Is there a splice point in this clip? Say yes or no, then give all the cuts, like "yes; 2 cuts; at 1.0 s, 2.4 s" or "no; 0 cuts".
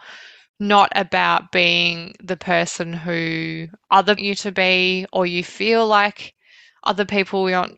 yes; 1 cut; at 4.2 s